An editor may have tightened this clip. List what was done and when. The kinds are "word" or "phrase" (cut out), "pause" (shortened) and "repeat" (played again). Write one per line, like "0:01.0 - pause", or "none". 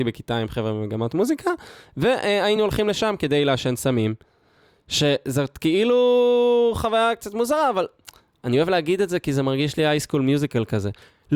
none